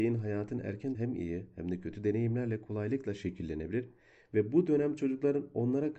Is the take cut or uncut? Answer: cut